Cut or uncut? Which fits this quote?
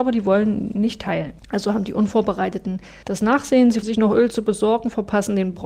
cut